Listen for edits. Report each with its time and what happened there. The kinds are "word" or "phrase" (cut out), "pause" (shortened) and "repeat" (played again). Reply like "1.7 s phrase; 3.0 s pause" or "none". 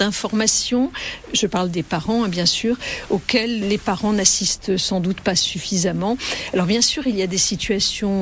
3.6 s word